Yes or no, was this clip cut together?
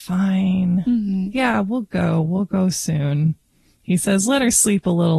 no